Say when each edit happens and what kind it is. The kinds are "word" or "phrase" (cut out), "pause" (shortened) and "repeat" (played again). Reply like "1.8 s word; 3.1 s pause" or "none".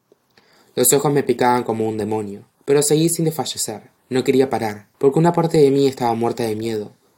2.5 s pause; 4.0 s pause; 4.9 s pause

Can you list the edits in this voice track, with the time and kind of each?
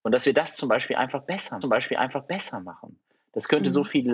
1.6 s repeat

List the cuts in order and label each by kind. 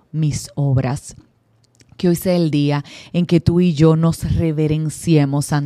none

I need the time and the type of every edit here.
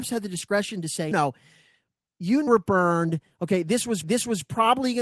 1.1 s word; 2.5 s word; 4.0 s repeat

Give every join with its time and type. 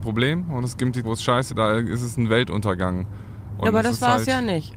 1.0 s word; 1.5 s word

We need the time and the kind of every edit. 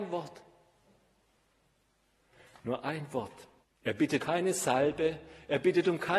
3.6 s pause; 4.2 s word

